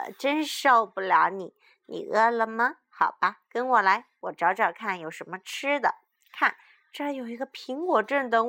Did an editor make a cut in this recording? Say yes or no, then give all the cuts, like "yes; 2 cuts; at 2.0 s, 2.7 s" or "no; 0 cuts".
no; 0 cuts